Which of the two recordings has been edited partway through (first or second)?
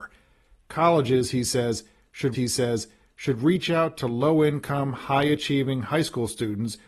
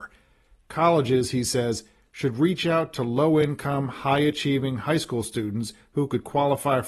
first